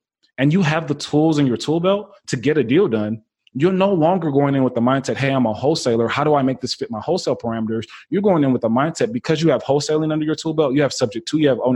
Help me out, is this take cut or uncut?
uncut